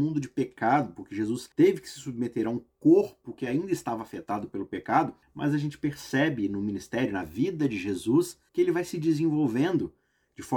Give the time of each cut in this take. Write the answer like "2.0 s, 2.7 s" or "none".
1.5 s, 5.2 s, 8.5 s